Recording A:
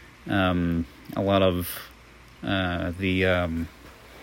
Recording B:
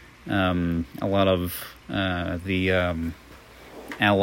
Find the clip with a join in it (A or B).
B